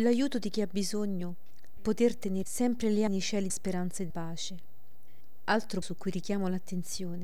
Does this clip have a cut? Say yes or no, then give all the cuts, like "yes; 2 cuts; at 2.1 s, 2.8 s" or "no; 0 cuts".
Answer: yes; 6 cuts; at 1.8 s, 2.4 s, 3.1 s, 3.5 s, 4.1 s, 5.8 s